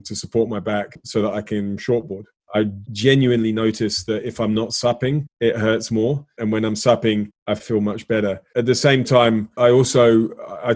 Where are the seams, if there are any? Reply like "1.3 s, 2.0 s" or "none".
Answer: none